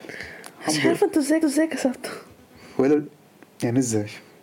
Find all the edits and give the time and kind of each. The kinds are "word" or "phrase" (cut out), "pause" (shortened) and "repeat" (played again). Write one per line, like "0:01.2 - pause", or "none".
0:01.4 - repeat